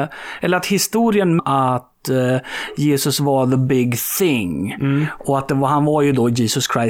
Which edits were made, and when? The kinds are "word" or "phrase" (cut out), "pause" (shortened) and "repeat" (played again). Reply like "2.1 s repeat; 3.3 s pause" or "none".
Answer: 1.4 s phrase